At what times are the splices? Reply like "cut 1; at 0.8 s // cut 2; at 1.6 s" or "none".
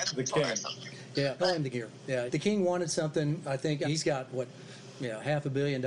cut 1; at 1.4 s // cut 2; at 1.7 s // cut 3; at 2.3 s // cut 4; at 3.8 s